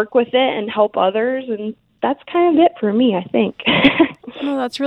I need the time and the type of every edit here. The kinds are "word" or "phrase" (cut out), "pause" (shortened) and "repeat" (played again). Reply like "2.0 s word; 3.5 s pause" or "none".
none